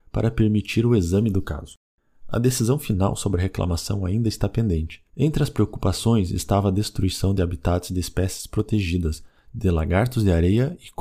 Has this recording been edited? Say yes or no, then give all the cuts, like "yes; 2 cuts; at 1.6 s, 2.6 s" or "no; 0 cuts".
yes; 1 cut; at 5.1 s